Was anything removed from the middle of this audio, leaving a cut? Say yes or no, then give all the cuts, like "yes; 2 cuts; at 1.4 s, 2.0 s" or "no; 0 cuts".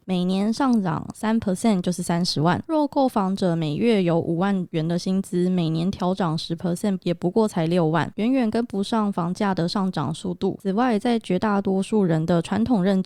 no; 0 cuts